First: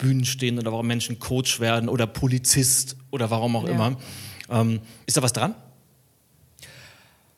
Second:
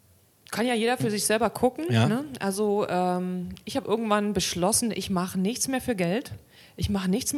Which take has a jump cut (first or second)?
first